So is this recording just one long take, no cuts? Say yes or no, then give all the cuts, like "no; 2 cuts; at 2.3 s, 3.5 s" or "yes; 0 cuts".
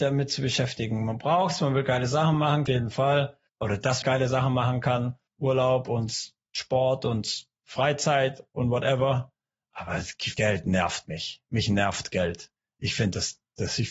no; 7 cuts; at 2.7 s, 3.5 s, 4.0 s, 5.3 s, 7.6 s, 10.3 s, 12.6 s